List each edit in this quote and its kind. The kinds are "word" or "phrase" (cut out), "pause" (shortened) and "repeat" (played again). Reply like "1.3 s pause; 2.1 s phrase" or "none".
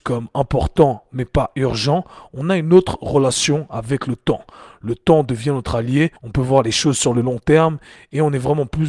6.2 s pause